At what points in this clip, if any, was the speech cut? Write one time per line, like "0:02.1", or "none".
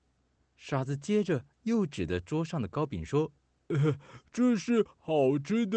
0:03.4